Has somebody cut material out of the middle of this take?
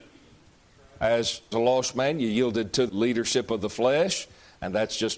yes; 2 cuts; at 1.5 s, 2.9 s

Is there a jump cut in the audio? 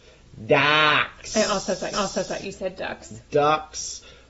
yes; 1 cut; at 1.9 s

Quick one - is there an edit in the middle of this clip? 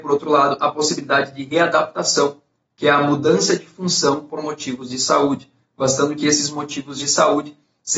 no; 0 cuts

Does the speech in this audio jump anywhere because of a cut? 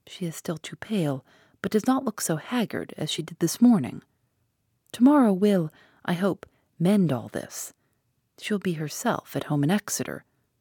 no; 0 cuts

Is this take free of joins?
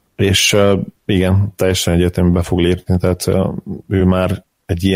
yes; 0 cuts

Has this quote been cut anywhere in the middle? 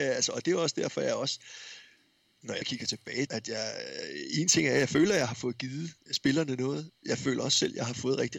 yes; 3 cuts; at 2.6 s, 3.3 s, 6.1 s

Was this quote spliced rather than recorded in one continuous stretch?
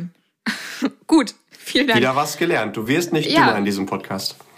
no; 0 cuts

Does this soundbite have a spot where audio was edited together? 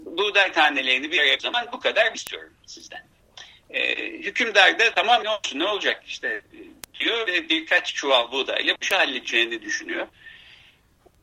yes; 4 cuts; at 1.4 s, 2.1 s, 5.2 s, 8.8 s

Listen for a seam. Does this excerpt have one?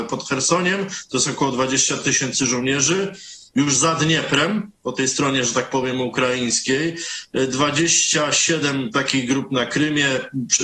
no; 0 cuts

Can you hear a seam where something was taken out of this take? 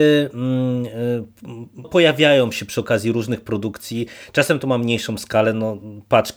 yes; 1 cut; at 1.8 s

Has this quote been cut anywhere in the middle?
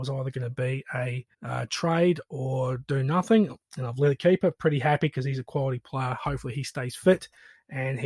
yes; 2 cuts; at 1.3 s, 4.2 s

